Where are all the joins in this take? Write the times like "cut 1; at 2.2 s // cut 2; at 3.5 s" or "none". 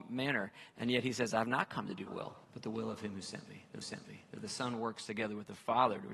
cut 1; at 2.1 s // cut 2; at 2.4 s // cut 3; at 3.8 s